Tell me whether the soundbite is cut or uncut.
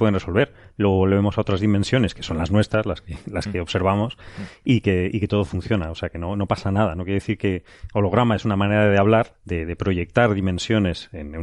cut